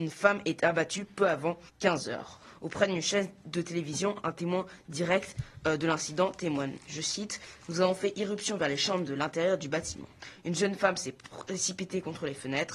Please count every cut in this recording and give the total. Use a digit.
1